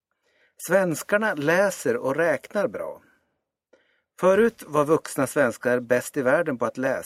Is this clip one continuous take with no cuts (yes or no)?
yes